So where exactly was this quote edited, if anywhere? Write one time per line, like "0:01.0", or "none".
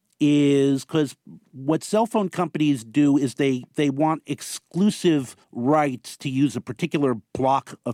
0:05.4